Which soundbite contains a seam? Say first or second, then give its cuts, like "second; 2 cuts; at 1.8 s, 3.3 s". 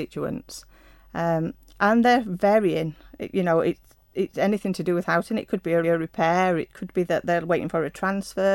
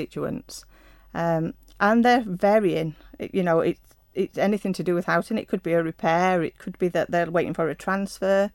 first; 1 cut; at 5.8 s